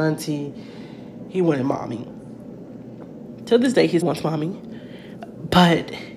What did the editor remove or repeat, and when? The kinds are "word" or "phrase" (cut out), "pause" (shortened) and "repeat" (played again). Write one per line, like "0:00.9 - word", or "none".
0:04.0 - word

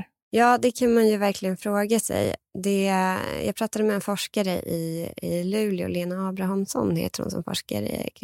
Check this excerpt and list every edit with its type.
none

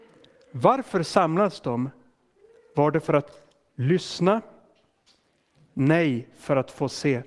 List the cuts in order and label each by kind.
none

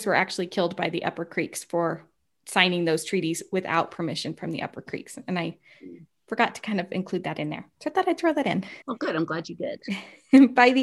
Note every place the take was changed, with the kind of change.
0:02.3 - pause
0:08.8 - pause

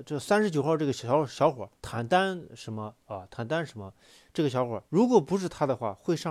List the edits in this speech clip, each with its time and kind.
0:01.7 - pause
0:04.9 - pause

